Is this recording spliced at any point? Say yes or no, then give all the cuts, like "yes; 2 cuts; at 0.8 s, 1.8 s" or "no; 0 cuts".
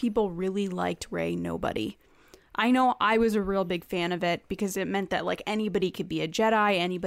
no; 0 cuts